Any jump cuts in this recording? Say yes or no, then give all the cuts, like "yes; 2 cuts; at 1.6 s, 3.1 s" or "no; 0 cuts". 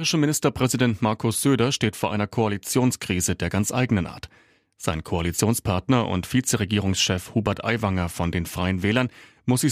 no; 0 cuts